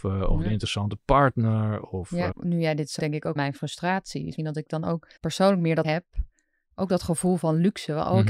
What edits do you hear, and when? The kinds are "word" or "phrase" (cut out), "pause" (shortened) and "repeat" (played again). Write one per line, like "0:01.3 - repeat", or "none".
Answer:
0:02.3 - word
0:03.0 - word
0:03.4 - phrase
0:04.4 - word
0:05.2 - pause
0:05.8 - word